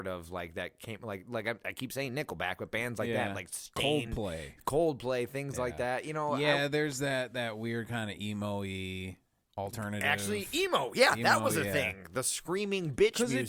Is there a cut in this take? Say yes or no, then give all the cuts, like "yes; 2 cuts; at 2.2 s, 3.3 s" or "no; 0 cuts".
no; 0 cuts